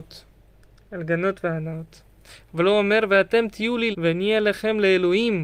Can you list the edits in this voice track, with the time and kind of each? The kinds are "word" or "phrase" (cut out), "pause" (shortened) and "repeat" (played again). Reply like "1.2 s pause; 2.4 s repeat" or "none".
3.9 s word